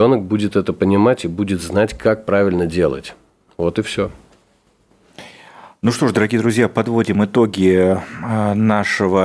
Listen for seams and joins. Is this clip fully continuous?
yes; 0 cuts

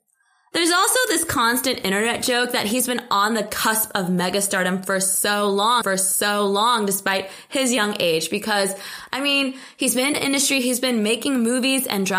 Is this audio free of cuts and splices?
no; 2 cuts; at 5.8 s, 10.1 s

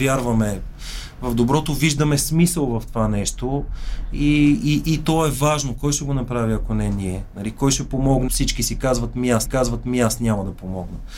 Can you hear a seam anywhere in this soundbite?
yes; 2 cuts; at 8.3 s, 9.5 s

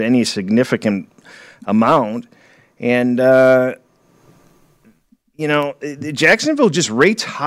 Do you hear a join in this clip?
no; 0 cuts

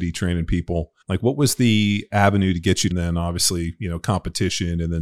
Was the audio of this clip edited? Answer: yes; 2 cuts; at 1.0 s, 2.9 s

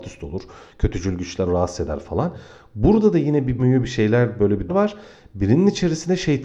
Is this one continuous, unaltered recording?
no; 3 cuts; at 1.5 s, 3.6 s, 4.7 s

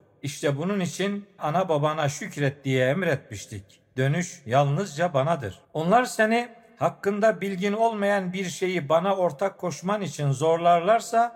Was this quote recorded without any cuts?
no; 2 cuts; at 1.4 s, 5.6 s

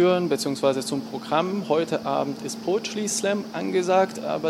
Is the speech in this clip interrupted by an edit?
no; 0 cuts

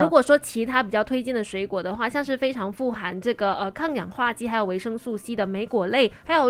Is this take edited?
no; 0 cuts

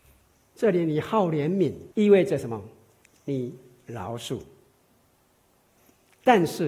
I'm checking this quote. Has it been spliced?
yes; 1 cut; at 1.9 s

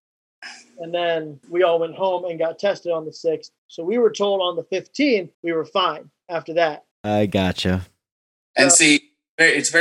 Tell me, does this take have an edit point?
yes; 4 cuts; at 1.4 s, 3.6 s, 5.3 s, 6.9 s

